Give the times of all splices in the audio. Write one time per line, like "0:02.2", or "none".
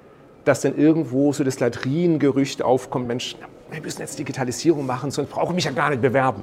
none